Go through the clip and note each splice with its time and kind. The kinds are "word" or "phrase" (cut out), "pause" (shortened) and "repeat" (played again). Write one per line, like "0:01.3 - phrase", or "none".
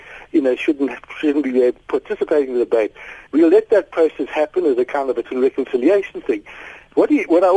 0:03.3 - pause
0:05.2 - word